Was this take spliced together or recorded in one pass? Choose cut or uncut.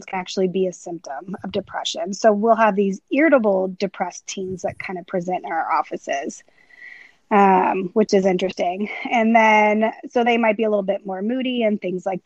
uncut